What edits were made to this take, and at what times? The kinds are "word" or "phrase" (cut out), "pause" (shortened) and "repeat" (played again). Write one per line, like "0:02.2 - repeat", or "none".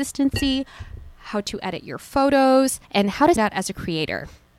0:02.8 - pause
0:03.4 - word